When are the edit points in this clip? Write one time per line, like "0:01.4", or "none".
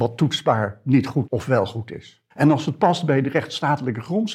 0:01.3
0:02.3